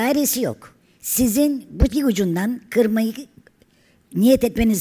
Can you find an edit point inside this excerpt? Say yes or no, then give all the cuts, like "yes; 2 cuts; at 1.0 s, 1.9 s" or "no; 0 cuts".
yes; 1 cut; at 1.9 s